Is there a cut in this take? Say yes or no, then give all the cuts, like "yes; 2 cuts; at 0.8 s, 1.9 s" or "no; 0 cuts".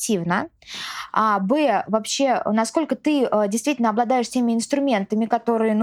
no; 0 cuts